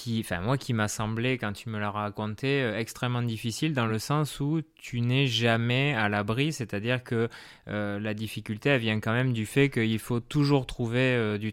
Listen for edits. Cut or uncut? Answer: uncut